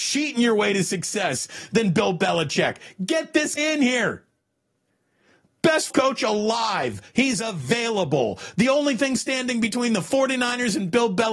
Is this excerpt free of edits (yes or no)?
no